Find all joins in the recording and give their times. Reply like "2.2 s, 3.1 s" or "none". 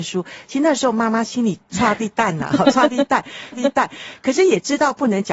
1.6 s, 3.5 s

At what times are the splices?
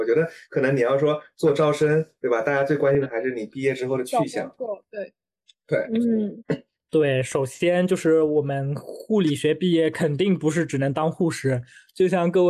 none

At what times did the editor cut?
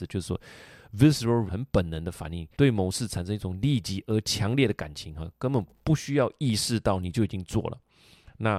1.5 s, 2.5 s

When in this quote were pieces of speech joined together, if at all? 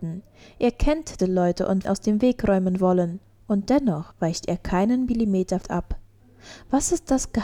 1.2 s, 1.8 s, 3.2 s, 4.1 s, 5.6 s

